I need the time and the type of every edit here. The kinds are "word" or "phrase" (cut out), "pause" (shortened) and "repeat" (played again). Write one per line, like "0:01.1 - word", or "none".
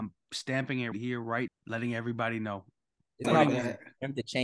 0:00.9 - word
0:01.5 - word
0:03.2 - word